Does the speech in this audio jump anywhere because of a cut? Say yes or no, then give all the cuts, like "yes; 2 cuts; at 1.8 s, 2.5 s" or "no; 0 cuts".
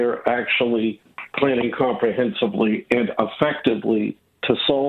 no; 0 cuts